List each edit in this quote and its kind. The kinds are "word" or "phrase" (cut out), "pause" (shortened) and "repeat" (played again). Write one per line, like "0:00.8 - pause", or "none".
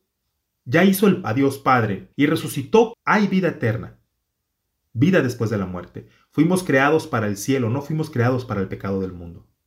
0:01.2 - word
0:02.1 - pause
0:02.9 - word